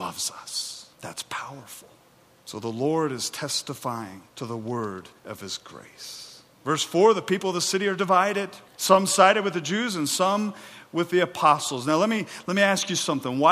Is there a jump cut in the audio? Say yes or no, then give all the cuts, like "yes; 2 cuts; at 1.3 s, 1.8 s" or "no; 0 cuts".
yes; 5 cuts; at 0.9 s, 2.1 s, 4.3 s, 5.2 s, 8.7 s